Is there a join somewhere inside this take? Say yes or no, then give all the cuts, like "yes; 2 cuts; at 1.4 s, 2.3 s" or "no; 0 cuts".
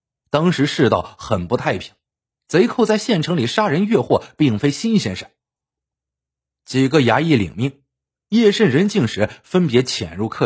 no; 0 cuts